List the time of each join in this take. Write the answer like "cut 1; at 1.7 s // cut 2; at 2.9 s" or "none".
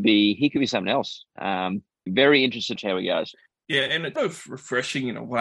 cut 1; at 2.1 s // cut 2; at 2.8 s // cut 3; at 4.2 s